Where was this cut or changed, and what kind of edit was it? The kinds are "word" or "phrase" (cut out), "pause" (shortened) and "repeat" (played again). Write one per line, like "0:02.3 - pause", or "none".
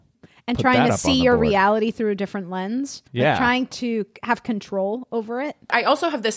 0:03.1 - pause